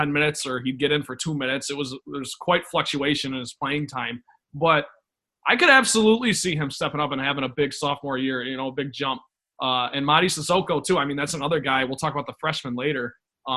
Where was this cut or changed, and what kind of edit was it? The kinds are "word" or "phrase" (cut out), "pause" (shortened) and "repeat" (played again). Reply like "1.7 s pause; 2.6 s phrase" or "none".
none